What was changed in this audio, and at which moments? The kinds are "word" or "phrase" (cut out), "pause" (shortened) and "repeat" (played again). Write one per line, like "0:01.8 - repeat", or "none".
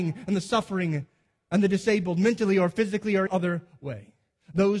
0:03.3 - word